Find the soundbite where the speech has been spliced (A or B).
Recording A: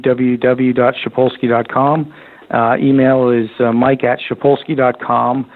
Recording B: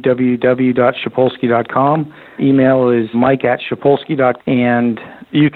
B